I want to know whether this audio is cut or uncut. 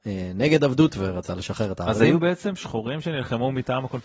uncut